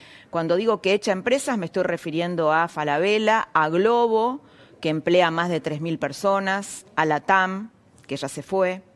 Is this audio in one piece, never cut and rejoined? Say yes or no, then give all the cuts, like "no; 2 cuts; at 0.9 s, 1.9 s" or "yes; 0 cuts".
yes; 0 cuts